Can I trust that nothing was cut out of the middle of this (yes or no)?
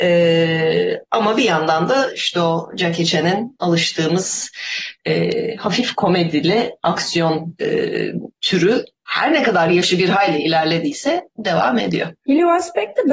no